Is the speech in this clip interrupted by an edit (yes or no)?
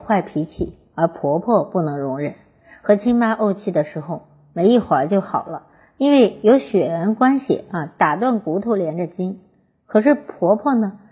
no